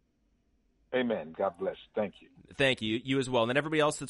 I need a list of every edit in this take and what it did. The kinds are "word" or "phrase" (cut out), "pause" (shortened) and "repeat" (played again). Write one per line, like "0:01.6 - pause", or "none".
none